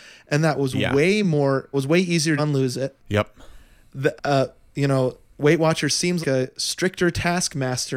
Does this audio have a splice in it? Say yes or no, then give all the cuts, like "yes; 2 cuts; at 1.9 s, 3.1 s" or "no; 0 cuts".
yes; 5 cuts; at 1.7 s, 2.4 s, 3.0 s, 4.2 s, 6.2 s